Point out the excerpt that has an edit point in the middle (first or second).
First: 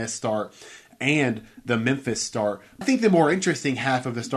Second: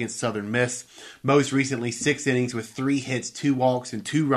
first